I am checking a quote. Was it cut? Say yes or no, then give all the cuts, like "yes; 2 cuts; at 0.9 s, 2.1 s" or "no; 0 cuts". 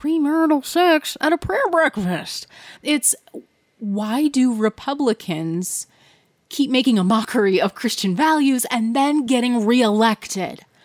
yes; 1 cut; at 2.8 s